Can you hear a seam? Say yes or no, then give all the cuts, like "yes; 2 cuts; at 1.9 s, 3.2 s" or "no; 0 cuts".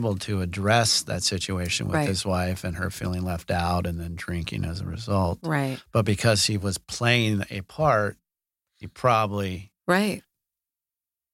no; 0 cuts